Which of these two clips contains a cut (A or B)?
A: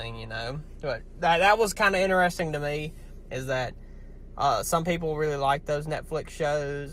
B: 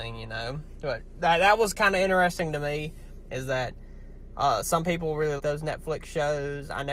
B